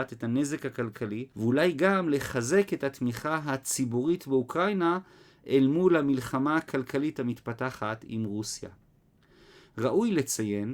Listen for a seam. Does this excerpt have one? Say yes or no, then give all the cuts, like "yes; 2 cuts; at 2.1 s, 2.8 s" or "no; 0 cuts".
yes; 1 cut; at 1.3 s